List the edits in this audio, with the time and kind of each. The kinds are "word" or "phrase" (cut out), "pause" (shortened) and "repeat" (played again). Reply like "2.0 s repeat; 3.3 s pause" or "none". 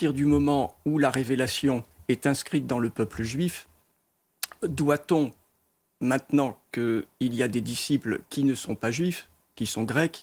none